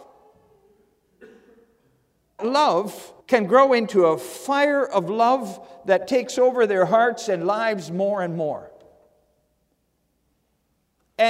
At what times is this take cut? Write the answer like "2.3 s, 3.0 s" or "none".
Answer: 2.4 s, 3.2 s

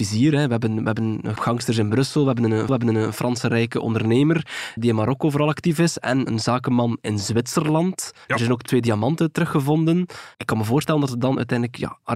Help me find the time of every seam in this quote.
1.4 s, 2.7 s, 4.8 s, 6.3 s, 8.2 s, 10.3 s

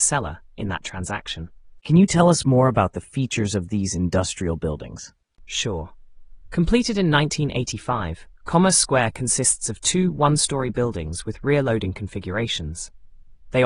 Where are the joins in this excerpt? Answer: 5.2 s

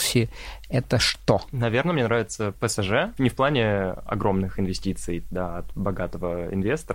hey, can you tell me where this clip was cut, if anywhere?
none

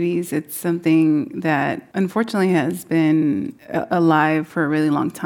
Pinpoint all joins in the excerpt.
1.9 s, 3.6 s

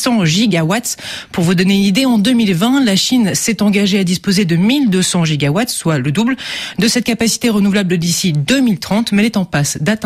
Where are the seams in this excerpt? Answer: none

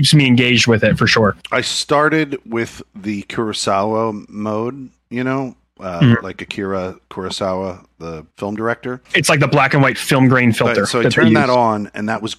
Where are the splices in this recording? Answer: 8.3 s, 9.0 s

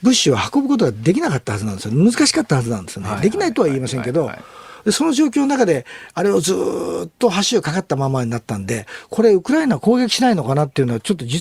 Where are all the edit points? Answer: none

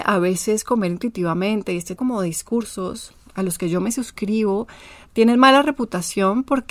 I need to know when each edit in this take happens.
2.0 s

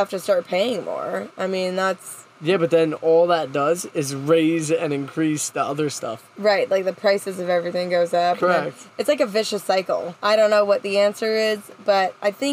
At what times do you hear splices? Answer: 10.2 s

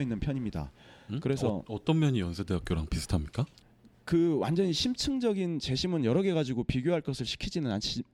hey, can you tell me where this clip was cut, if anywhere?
3.6 s

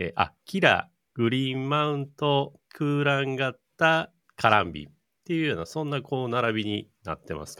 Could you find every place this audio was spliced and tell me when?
4.2 s

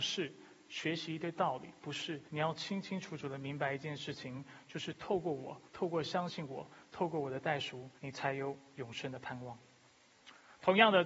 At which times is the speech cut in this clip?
2.3 s, 5.7 s, 8.0 s

